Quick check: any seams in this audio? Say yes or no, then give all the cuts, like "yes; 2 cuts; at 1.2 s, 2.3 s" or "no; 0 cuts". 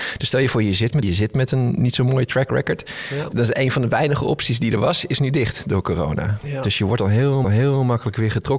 yes; 2 cuts; at 1.0 s, 7.4 s